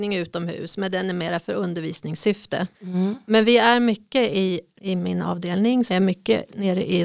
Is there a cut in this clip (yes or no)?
yes